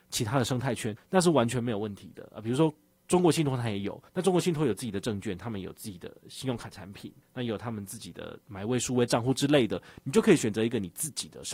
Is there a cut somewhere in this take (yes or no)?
yes